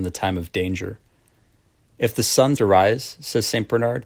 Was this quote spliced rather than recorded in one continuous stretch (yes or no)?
yes